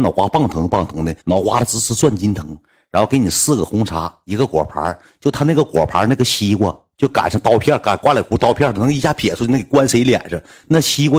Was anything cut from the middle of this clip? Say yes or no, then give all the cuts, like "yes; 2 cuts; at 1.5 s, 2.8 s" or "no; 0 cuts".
yes; 1 cut; at 1.2 s